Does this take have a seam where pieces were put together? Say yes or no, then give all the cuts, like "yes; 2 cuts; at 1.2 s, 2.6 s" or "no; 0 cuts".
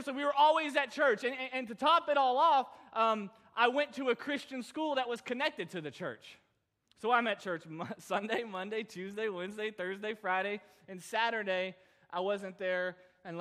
no; 0 cuts